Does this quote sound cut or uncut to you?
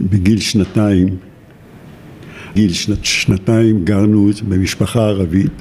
cut